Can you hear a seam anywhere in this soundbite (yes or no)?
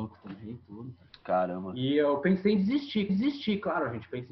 yes